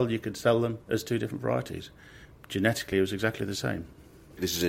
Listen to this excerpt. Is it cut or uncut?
uncut